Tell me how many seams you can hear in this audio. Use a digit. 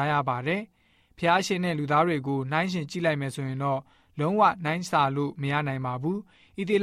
0